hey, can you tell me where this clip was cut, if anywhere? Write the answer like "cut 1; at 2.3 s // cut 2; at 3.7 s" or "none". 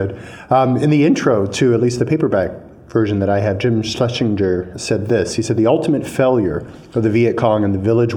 cut 1; at 4.7 s